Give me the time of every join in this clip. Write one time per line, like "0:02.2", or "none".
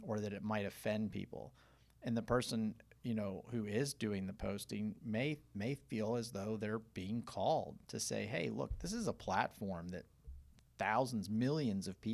none